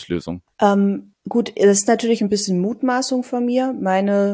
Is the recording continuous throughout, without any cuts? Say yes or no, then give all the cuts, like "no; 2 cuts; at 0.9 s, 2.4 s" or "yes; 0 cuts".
yes; 0 cuts